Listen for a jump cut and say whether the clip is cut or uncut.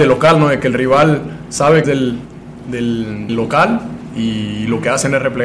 cut